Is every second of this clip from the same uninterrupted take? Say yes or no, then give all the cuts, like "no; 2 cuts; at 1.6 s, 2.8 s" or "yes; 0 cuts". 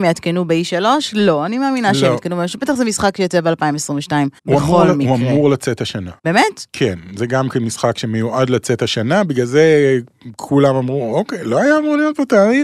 no; 2 cuts; at 4.4 s, 6.2 s